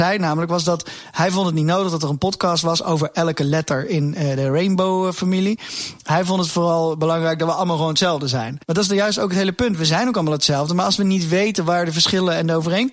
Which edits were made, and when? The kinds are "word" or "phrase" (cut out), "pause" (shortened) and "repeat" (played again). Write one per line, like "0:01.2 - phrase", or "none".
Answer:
0:08.6 - pause